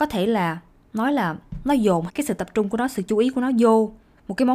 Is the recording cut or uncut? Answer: cut